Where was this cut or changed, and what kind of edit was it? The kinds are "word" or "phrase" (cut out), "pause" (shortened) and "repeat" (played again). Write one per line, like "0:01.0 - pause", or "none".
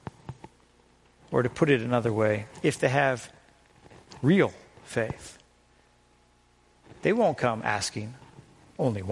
none